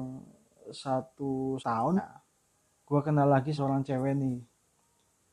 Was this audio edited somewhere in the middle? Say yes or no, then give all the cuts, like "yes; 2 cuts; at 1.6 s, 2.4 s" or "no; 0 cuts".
yes; 4 cuts; at 1.6 s, 2.0 s, 2.5 s, 3.6 s